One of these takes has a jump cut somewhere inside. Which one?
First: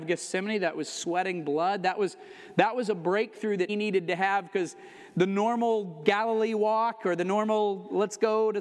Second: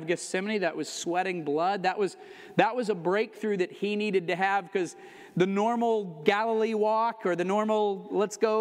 first; 1 cut; at 3.7 s

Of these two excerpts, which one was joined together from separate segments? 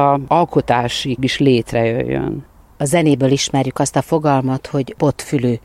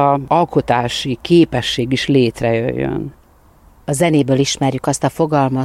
first; 2 cuts; at 1.2 s, 2.5 s

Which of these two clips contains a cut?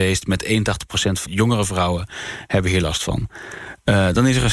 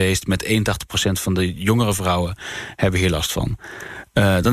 first; 1 cut; at 1.3 s

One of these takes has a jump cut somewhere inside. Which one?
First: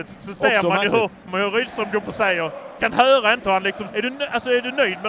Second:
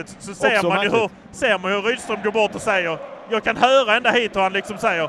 first; 5 cuts; at 1.3 s, 2.0 s, 2.8 s, 3.4 s, 3.9 s

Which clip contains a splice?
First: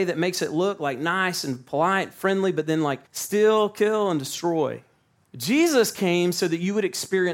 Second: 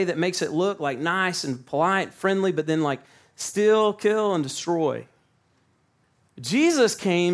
first; 2 cuts; at 3.1 s, 5.2 s

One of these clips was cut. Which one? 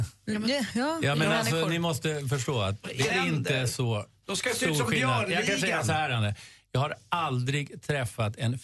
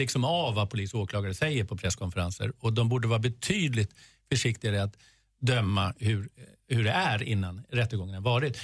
first; 1 cut; at 3.1 s

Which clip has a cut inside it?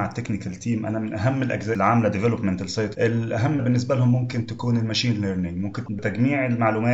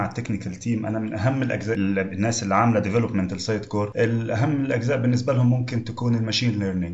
first; 4 cuts; at 1.7 s, 2.9 s, 3.6 s, 5.9 s

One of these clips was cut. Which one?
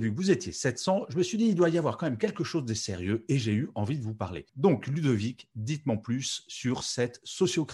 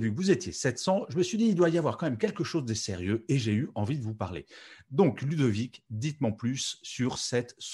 first; 1 cut; at 4.5 s

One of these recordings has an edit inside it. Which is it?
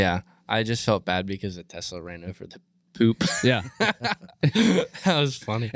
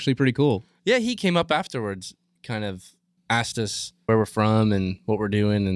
second; 3 cuts; at 2.4 s, 3.2 s, 4.1 s

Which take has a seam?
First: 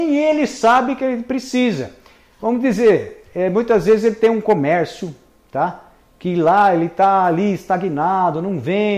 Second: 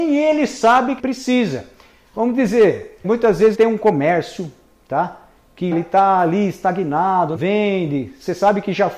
second; 5 cuts; at 1.0 s, 3.0 s, 3.5 s, 5.7 s, 7.4 s

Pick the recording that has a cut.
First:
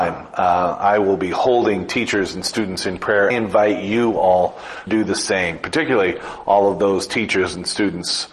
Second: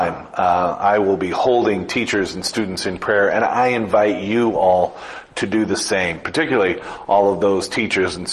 first; 2 cuts; at 3.3 s, 4.9 s

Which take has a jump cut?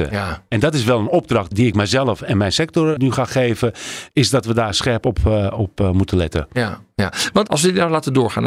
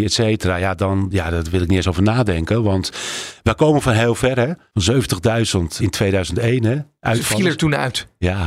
second; 1 cut; at 5.8 s

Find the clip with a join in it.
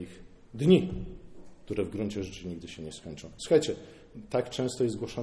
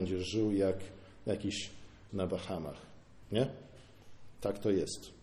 second; 1 cut; at 2.1 s

